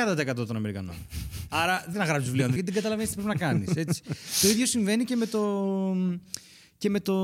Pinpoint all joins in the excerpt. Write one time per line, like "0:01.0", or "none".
0:01.9
0:02.6